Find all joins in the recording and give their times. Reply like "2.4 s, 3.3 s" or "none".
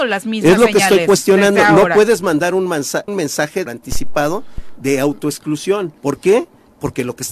3.1 s, 3.7 s, 6.0 s